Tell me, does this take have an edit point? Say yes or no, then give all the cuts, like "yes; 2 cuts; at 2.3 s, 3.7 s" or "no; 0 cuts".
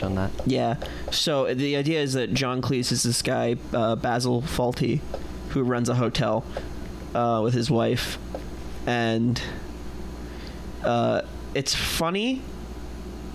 no; 0 cuts